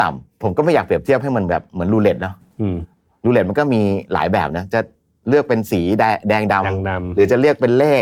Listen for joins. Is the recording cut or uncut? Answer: uncut